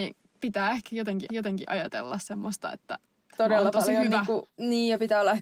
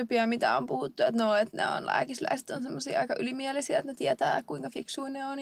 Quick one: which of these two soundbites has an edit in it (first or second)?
first